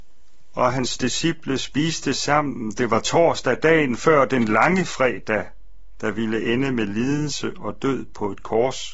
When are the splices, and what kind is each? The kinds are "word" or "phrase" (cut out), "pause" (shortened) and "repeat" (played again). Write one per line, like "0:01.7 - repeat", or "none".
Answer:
none